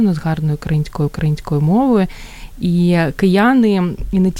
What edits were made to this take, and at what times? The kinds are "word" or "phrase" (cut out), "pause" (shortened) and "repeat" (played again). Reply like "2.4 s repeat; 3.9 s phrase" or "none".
1.1 s repeat